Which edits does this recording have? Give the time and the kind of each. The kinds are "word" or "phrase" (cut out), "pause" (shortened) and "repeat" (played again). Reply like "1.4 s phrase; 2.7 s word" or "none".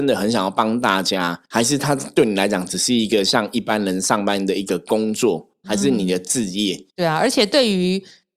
1.4 s pause; 6.9 s pause